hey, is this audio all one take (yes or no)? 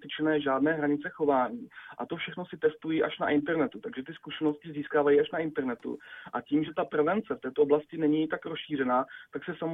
yes